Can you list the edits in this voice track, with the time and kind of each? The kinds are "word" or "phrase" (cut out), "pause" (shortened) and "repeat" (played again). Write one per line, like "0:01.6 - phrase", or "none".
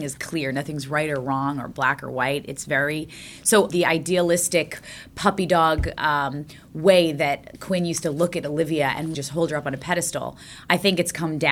0:09.1 - word